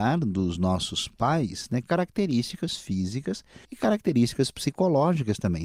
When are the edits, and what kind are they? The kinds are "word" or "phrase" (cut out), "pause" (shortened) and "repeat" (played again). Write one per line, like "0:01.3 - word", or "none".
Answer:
0:03.6 - pause